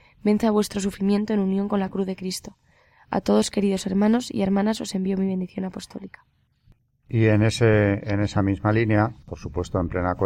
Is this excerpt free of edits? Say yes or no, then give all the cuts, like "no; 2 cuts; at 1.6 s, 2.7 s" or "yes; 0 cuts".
yes; 0 cuts